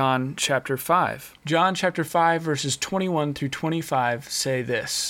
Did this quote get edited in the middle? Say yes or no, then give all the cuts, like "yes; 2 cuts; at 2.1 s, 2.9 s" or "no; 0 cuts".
yes; 1 cut; at 1.4 s